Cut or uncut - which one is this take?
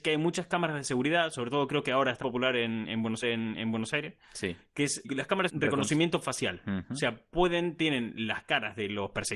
cut